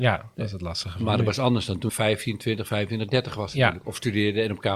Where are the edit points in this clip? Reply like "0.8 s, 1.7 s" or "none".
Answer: 1.9 s